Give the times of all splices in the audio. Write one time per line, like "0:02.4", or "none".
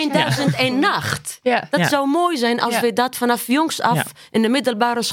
none